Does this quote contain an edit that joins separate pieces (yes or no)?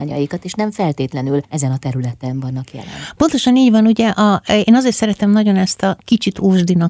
yes